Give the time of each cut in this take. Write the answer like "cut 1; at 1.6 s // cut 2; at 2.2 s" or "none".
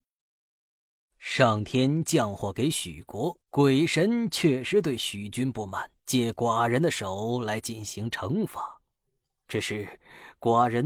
cut 1; at 3.4 s // cut 2; at 6.0 s